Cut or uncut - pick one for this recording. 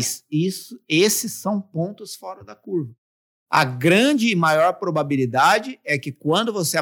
uncut